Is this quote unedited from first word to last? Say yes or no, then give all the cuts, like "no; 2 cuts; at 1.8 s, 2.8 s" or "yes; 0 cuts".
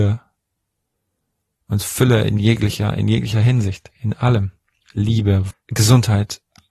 no; 1 cut; at 5.5 s